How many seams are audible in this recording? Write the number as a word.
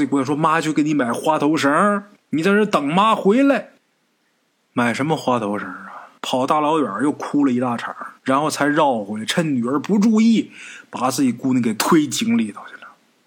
four